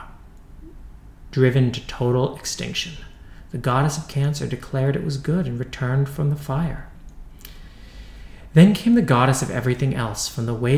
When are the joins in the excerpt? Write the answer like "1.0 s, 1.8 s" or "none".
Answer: none